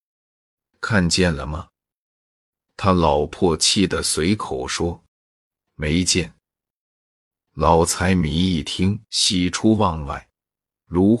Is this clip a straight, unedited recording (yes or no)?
no